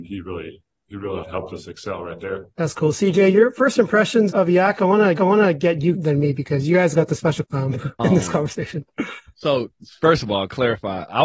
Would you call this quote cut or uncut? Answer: cut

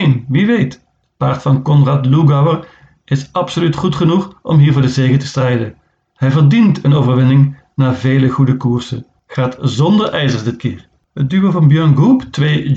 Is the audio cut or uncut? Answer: uncut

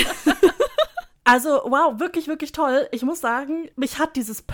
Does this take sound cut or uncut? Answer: uncut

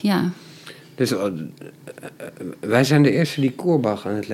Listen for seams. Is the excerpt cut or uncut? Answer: uncut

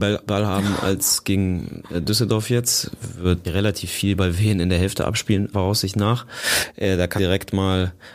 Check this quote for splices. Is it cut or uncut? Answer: cut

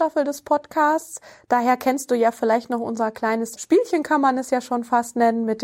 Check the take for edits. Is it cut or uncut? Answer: cut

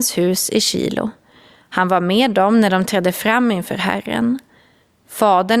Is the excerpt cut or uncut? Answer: uncut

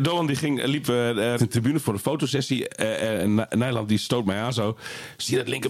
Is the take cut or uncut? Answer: cut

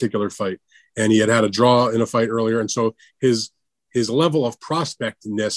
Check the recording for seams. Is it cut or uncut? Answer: uncut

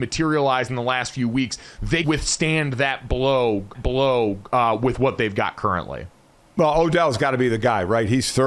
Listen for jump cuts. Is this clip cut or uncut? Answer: cut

